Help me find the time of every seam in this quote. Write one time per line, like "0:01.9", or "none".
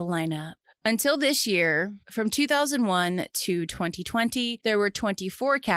none